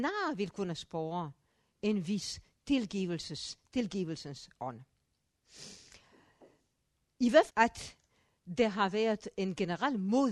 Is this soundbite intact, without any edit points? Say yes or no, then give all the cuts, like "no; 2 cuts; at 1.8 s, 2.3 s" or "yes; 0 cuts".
no; 1 cut; at 7.5 s